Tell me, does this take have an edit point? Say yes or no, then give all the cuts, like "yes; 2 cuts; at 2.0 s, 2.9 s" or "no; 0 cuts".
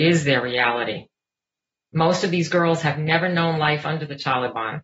no; 0 cuts